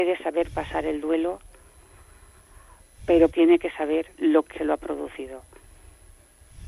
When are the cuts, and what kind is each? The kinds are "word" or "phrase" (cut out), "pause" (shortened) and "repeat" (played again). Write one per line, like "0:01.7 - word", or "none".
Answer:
0:03.3 - word
0:04.1 - pause
0:04.5 - word